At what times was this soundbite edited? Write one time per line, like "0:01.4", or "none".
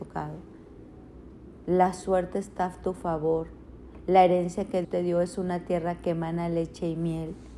0:04.8